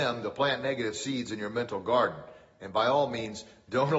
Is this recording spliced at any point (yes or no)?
no